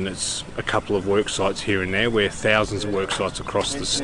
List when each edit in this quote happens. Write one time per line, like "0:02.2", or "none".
none